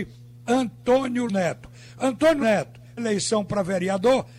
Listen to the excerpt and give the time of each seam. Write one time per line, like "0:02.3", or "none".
0:01.3
0:02.4
0:03.0